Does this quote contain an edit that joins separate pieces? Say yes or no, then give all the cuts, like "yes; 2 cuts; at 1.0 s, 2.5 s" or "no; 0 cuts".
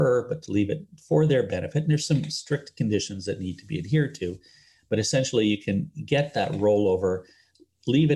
no; 0 cuts